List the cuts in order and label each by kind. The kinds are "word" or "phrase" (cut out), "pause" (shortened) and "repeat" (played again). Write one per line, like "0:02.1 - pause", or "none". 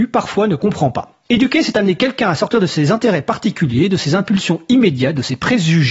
0:01.3 - pause